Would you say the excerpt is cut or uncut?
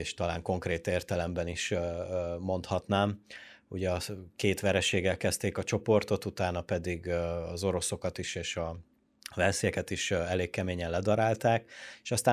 uncut